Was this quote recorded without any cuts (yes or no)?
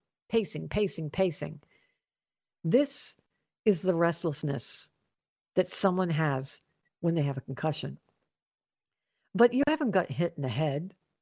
yes